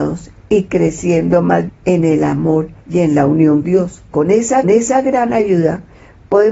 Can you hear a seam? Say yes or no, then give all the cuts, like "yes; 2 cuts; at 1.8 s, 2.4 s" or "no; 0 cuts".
yes; 5 cuts; at 1.7 s, 2.8 s, 3.6 s, 4.1 s, 4.6 s